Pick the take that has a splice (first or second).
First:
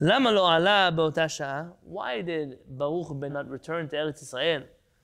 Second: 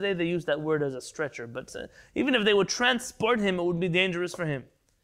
first